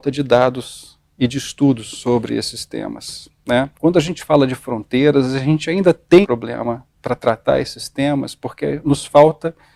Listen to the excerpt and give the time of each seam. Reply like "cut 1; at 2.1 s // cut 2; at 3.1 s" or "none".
cut 1; at 3.7 s // cut 2; at 6.2 s